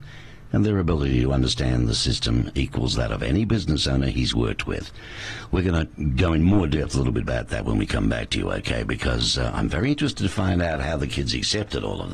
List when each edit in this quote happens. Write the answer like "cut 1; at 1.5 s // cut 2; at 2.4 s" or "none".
none